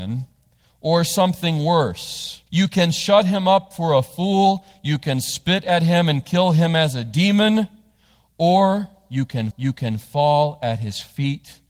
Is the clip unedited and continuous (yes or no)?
no